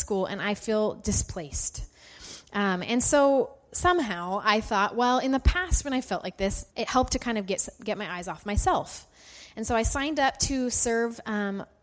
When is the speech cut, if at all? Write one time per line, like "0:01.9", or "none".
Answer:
0:06.7